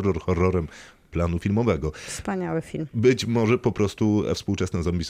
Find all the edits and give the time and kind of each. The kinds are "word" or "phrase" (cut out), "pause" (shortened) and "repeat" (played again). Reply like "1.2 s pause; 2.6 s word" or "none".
none